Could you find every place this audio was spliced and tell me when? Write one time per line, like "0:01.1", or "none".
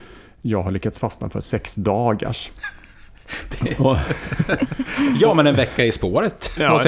none